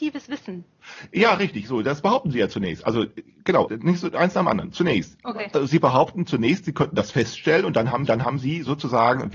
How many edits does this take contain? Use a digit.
2